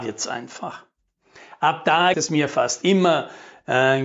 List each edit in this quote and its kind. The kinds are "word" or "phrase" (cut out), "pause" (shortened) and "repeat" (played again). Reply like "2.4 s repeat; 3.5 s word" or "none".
2.1 s word